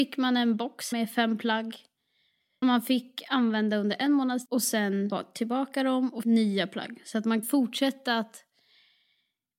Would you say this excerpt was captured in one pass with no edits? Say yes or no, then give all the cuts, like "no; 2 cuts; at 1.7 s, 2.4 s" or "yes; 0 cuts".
no; 6 cuts; at 0.9 s, 2.6 s, 4.5 s, 5.1 s, 6.2 s, 7.4 s